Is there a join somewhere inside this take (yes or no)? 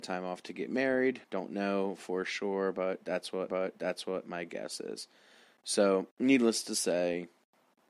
yes